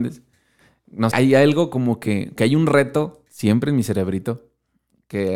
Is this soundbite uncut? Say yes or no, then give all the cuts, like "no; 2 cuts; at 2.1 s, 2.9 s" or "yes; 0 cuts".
no; 2 cuts; at 1.1 s, 2.4 s